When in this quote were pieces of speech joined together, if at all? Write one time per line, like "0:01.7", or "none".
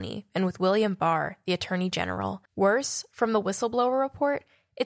0:02.5